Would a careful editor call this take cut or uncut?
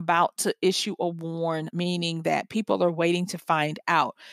cut